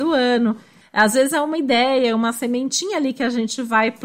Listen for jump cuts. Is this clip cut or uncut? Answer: uncut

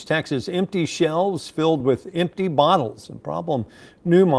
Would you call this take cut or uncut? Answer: uncut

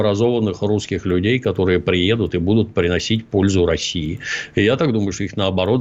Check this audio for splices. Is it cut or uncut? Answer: uncut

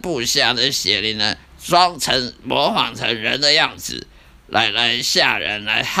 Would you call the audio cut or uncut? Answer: uncut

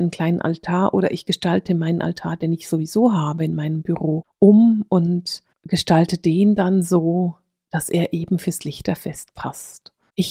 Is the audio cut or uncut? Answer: uncut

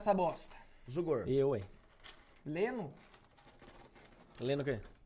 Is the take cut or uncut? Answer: uncut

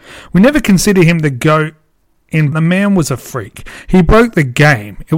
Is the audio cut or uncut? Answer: cut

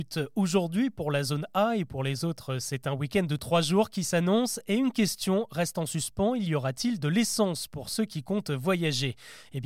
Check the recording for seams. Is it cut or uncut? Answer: uncut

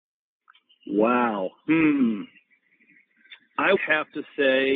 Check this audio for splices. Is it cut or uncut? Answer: cut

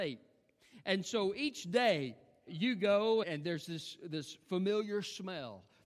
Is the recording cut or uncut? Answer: cut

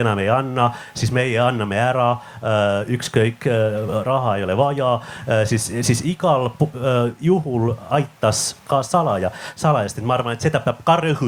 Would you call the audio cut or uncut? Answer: uncut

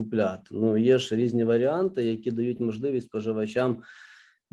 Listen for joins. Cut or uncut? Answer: uncut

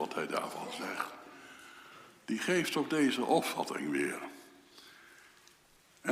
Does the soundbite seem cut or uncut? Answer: uncut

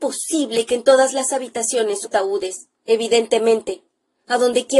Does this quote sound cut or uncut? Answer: cut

